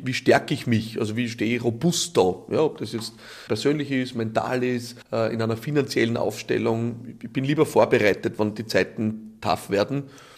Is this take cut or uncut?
cut